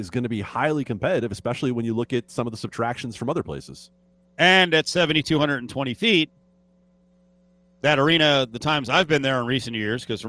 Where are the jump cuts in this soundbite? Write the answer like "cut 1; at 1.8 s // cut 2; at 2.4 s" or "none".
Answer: none